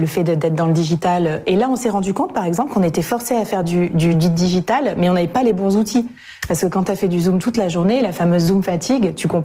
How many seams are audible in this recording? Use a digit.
0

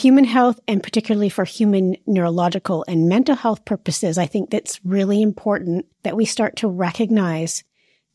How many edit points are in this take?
1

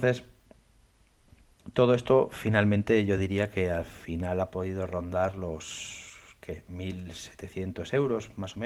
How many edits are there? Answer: 0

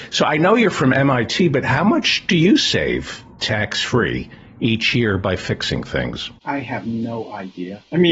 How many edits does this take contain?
1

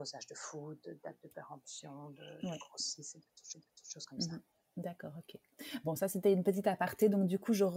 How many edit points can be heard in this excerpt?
1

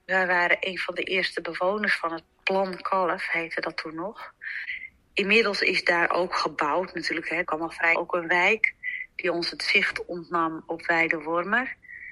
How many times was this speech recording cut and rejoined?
2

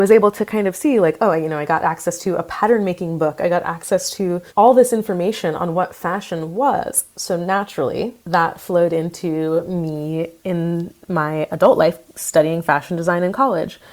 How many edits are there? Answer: 2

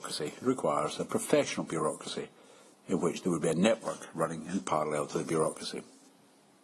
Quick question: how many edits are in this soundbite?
0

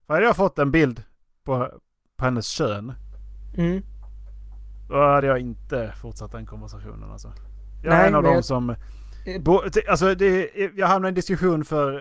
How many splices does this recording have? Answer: 0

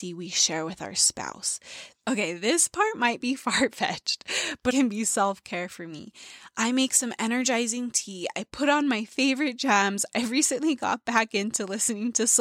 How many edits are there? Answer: 1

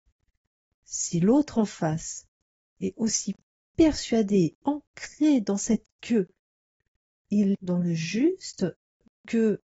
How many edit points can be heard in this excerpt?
2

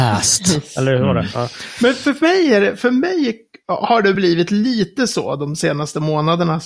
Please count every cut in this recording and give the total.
0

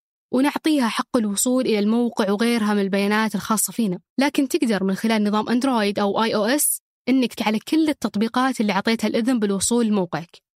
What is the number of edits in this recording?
2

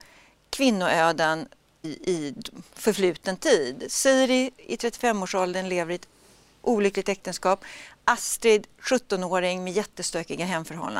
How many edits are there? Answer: 1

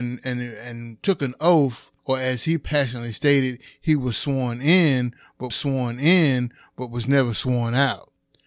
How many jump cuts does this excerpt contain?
2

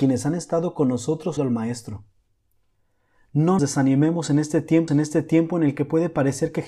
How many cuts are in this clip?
3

